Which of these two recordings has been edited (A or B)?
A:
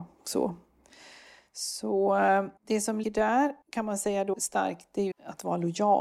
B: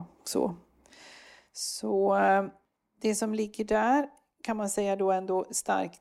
A